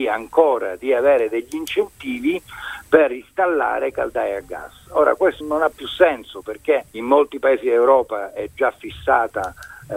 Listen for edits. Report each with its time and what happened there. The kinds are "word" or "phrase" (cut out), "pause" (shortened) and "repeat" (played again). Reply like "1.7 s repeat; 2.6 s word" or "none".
5.4 s word; 6.9 s pause